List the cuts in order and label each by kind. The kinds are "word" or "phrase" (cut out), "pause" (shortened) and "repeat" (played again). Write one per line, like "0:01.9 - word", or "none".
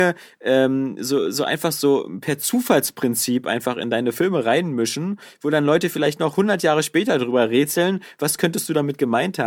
none